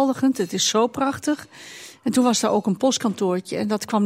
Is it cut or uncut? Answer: uncut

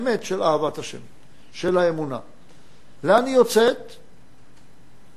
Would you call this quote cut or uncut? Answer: uncut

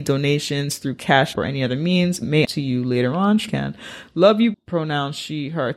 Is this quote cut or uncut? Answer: cut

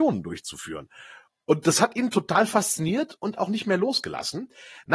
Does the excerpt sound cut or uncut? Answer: uncut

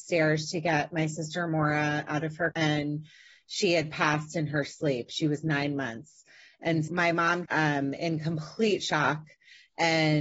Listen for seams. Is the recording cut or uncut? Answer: cut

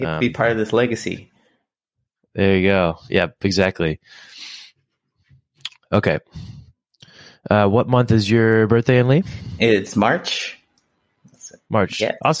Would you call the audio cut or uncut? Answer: uncut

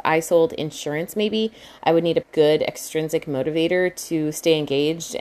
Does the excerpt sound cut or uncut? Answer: cut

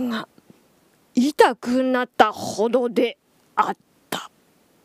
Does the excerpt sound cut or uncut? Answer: cut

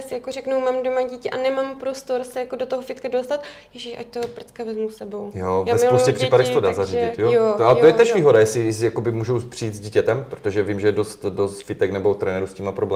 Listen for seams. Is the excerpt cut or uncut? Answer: uncut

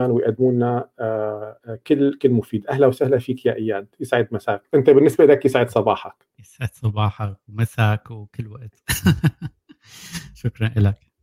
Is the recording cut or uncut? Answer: cut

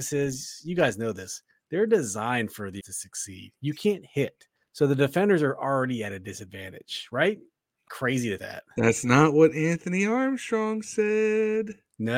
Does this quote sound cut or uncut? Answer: cut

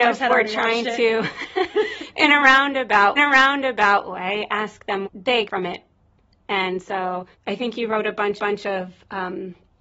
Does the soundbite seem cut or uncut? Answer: cut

